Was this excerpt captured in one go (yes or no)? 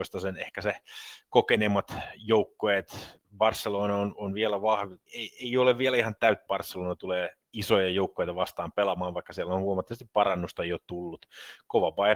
no